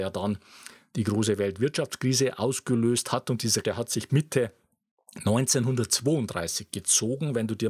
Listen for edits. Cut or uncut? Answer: cut